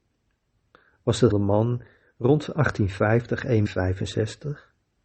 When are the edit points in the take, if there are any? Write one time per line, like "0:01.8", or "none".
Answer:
0:01.3
0:03.7